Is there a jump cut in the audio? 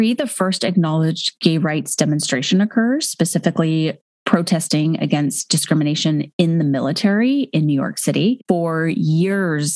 no; 0 cuts

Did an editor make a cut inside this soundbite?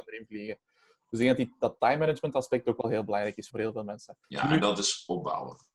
yes; 2 cuts; at 3.5 s, 4.2 s

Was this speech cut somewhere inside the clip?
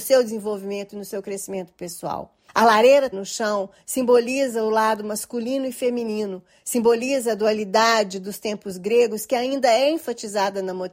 yes; 2 cuts; at 2.5 s, 3.1 s

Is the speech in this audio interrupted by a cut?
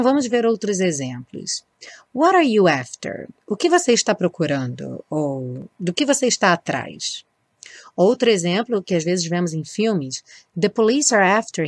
no; 0 cuts

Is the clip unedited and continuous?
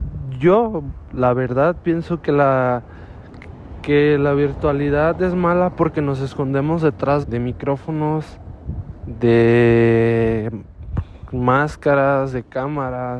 no; 1 cut; at 7.2 s

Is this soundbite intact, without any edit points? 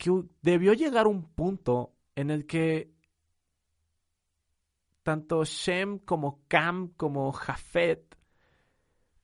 yes; 0 cuts

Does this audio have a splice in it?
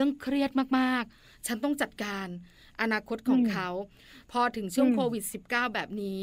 no; 0 cuts

